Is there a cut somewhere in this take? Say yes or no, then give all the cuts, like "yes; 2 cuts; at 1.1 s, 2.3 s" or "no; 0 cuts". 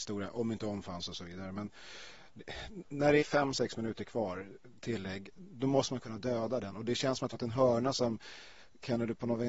yes; 4 cuts; at 3.2 s, 5.4 s, 6.7 s, 7.3 s